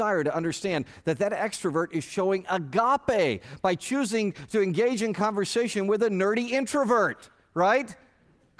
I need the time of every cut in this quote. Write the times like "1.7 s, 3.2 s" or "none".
none